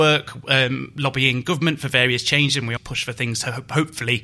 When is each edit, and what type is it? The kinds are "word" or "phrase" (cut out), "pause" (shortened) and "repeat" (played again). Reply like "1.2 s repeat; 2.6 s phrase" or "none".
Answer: 2.8 s word